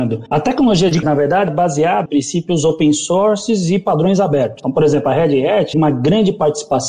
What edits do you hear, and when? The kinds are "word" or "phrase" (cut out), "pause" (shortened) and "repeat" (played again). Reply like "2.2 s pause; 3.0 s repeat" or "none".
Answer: 1.0 s word; 1.5 s word; 2.1 s word; 5.7 s phrase